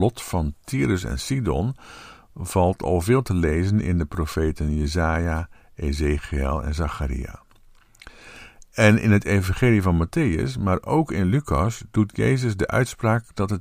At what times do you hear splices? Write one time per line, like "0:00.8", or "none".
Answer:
none